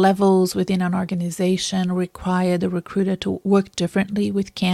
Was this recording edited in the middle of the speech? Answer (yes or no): no